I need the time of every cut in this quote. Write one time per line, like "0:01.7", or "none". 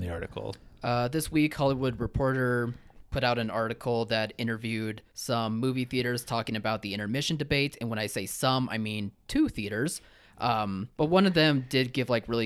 0:05.1
0:10.9